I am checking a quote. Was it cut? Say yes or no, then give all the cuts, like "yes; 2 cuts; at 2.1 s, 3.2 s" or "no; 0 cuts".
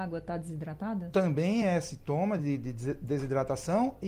no; 0 cuts